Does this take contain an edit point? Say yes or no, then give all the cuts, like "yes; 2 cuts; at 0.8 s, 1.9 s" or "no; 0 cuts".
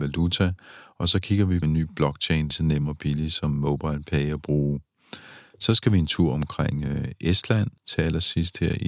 yes; 3 cuts; at 1.6 s, 2.5 s, 7.8 s